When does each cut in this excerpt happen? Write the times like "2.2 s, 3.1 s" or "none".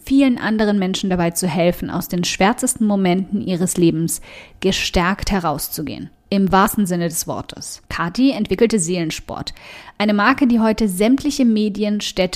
6.2 s, 7.9 s